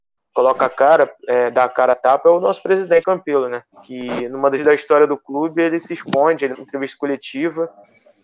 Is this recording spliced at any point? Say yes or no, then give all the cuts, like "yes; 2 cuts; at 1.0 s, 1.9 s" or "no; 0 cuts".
yes; 4 cuts; at 3.0 s, 3.7 s, 4.6 s, 6.5 s